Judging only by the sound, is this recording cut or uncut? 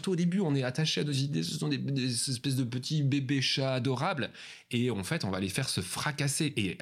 uncut